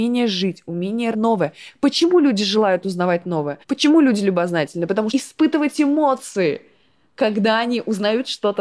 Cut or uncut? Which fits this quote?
cut